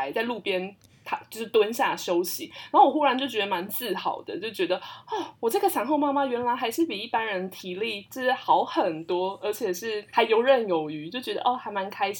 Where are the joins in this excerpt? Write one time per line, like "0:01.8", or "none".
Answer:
0:10.1

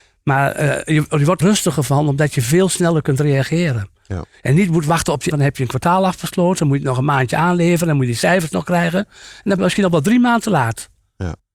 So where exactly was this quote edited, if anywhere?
0:01.4
0:05.3
0:09.6

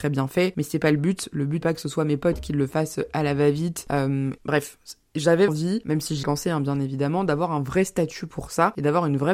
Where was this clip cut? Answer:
0:01.6
0:04.4
0:05.5
0:06.2

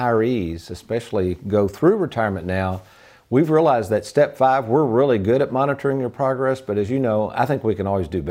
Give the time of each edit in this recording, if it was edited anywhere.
none

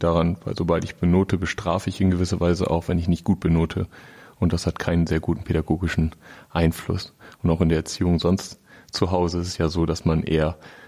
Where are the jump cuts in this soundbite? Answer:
none

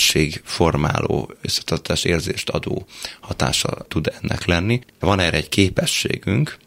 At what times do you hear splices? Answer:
none

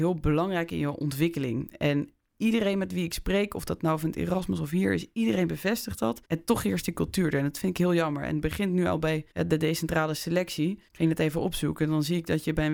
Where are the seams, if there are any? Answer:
0:06.2
0:09.3
0:10.9

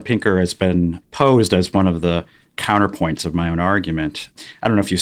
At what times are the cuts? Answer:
none

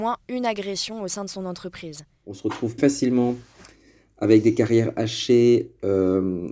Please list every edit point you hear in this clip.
0:02.8

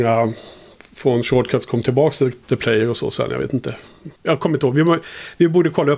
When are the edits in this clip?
0:04.2

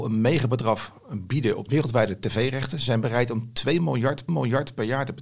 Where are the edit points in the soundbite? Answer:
0:01.7
0:04.3

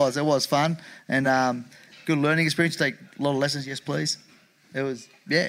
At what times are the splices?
none

